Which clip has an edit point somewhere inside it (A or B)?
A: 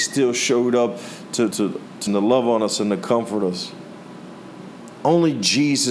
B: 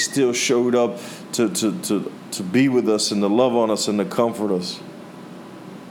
A